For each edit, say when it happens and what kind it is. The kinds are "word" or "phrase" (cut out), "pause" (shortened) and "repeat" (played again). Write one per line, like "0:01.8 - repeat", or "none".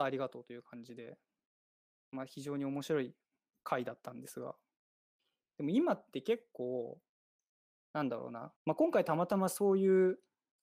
0:08.6 - pause